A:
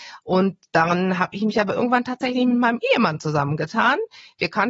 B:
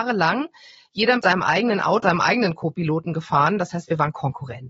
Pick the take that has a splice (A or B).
B